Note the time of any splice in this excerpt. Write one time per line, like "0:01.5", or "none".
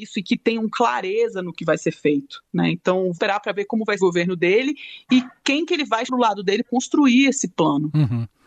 0:03.1
0:04.0
0:06.1
0:06.6